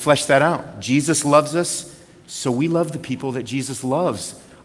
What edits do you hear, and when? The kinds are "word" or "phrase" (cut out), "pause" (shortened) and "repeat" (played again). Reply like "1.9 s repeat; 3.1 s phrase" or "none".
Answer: none